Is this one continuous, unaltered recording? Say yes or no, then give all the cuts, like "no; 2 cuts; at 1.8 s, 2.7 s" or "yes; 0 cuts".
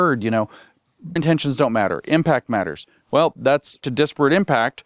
no; 2 cuts; at 1.2 s, 3.8 s